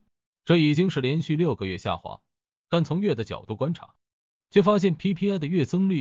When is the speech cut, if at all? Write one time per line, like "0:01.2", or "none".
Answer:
none